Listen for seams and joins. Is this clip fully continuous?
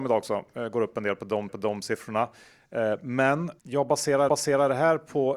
no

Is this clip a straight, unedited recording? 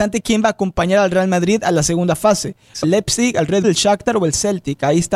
no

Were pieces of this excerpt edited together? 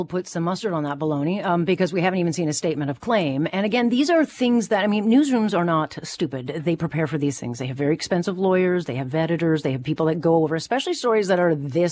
no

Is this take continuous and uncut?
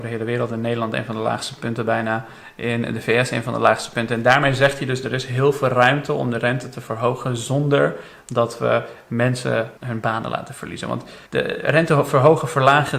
no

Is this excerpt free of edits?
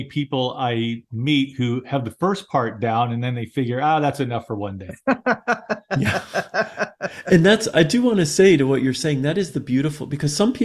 yes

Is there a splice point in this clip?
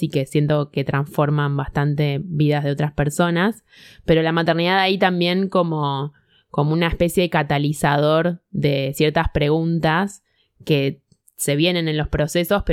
no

